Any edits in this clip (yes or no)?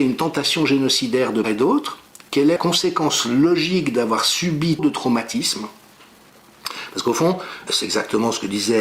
yes